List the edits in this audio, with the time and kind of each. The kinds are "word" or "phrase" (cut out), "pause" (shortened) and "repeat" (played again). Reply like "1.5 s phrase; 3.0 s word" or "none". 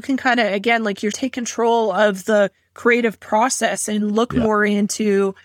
1.1 s word